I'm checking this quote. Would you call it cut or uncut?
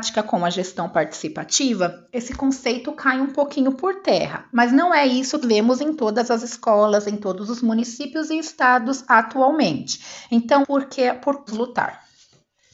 cut